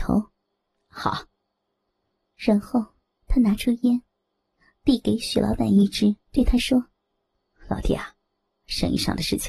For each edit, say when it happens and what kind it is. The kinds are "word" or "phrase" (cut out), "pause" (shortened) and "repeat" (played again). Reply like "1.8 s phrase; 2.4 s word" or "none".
1.4 s pause; 6.3 s pause; 7.0 s pause